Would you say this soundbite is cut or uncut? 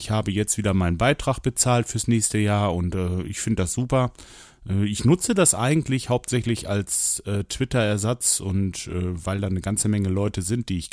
uncut